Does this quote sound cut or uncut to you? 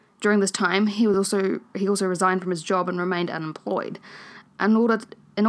uncut